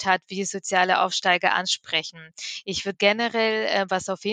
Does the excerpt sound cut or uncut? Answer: cut